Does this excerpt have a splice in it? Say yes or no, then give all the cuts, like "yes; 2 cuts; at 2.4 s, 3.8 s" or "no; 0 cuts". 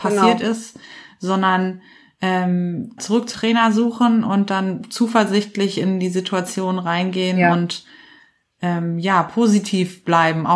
yes; 2 cuts; at 3.0 s, 3.3 s